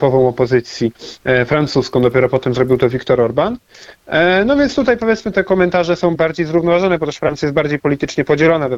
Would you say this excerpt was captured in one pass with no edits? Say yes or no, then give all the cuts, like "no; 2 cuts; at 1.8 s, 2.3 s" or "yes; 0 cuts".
no; 2 cuts; at 5.3 s, 6.1 s